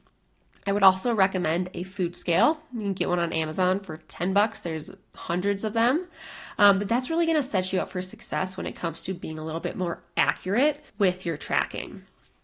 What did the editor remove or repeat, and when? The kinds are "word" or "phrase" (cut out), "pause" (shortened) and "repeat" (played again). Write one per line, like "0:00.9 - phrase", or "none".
0:10.9 - pause